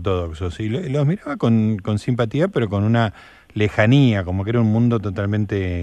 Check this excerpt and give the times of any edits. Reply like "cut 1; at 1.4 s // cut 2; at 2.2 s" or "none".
none